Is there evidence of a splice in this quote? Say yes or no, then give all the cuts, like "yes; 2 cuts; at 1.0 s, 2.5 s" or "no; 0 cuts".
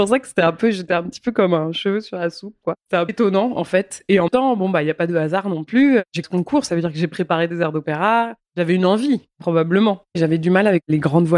yes; 3 cuts; at 3.1 s, 4.3 s, 6.2 s